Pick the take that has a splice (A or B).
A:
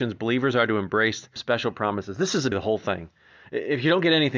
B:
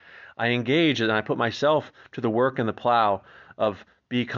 A